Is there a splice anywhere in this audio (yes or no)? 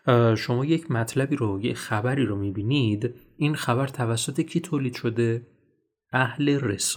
no